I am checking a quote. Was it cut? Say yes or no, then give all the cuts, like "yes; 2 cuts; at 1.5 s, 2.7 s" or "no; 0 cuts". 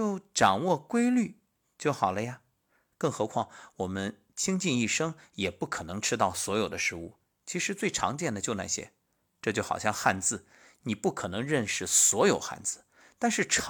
no; 0 cuts